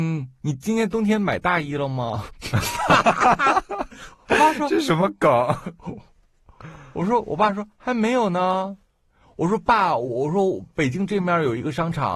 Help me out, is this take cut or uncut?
uncut